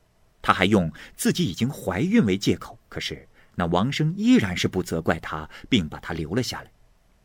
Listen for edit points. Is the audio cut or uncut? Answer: cut